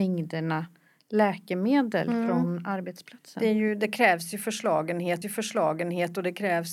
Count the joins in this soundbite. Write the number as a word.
one